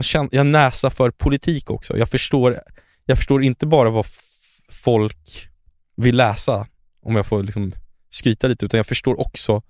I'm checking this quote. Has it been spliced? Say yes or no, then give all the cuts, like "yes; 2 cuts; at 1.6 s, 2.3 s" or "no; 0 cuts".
no; 0 cuts